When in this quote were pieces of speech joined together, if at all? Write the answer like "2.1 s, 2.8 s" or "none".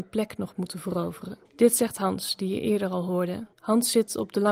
1.4 s, 3.5 s